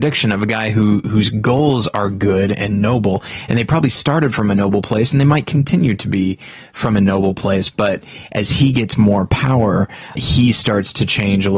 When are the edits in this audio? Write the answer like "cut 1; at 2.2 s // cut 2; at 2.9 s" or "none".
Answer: cut 1; at 10.2 s